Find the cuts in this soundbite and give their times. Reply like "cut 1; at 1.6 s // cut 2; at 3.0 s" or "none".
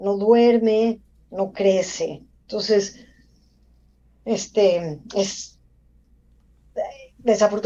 none